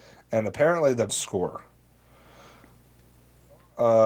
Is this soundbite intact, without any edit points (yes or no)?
no